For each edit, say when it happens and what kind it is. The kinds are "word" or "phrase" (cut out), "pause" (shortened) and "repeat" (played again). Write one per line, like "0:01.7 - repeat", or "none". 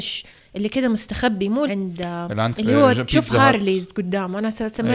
0:01.7 - word
0:02.5 - phrase